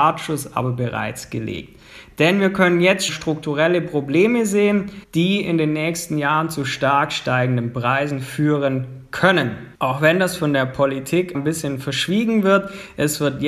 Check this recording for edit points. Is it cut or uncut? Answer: cut